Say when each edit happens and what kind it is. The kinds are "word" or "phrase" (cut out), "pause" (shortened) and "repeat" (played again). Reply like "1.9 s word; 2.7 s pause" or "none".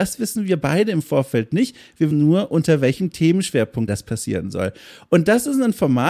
2.1 s word; 3.9 s word

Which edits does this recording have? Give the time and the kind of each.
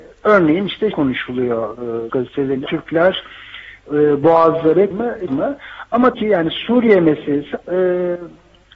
0.9 s word; 2.1 s word; 2.7 s word; 4.9 s word; 5.3 s word; 6.1 s word; 7.6 s word

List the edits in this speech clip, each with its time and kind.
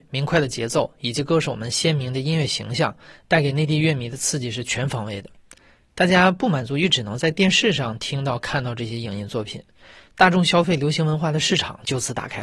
none

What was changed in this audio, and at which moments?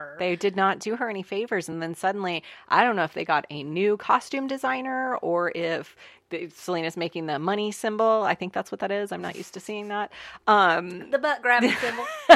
none

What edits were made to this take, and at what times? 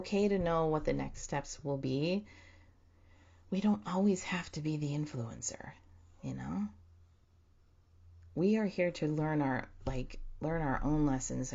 none

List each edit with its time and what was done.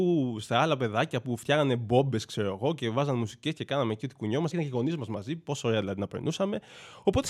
4.5 s phrase

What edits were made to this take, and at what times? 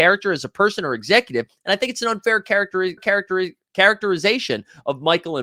3.0 s repeat

